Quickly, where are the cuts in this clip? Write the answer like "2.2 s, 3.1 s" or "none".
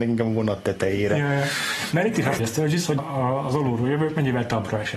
2.4 s, 3.0 s